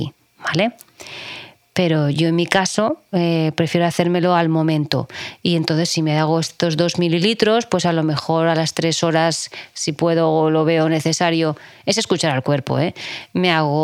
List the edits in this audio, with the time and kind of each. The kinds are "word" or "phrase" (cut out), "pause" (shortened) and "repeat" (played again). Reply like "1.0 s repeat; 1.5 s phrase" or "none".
none